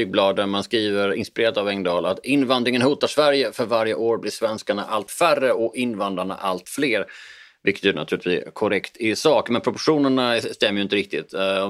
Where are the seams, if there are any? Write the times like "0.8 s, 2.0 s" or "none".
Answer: none

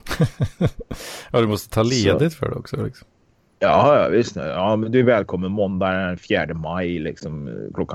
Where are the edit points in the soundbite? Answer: none

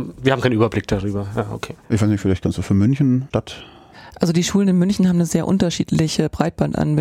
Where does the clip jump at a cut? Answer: 1.8 s

